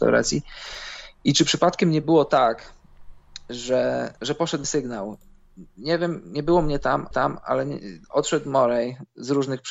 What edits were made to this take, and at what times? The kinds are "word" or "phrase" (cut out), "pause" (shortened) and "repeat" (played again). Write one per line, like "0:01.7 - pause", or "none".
0:04.2 - pause
0:04.6 - word
0:07.1 - repeat
0:08.0 - pause